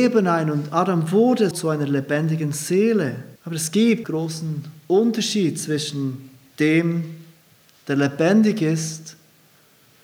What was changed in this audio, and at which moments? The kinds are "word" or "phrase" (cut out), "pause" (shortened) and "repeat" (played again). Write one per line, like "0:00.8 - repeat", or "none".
0:01.5 - word
0:03.4 - pause
0:04.0 - word